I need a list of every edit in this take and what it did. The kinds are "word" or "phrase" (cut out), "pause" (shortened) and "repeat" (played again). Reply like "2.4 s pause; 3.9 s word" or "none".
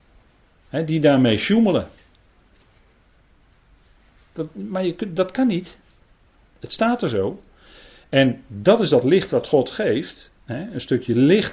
none